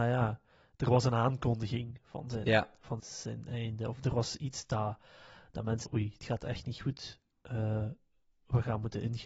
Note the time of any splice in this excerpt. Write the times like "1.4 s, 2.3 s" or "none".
3.0 s, 5.8 s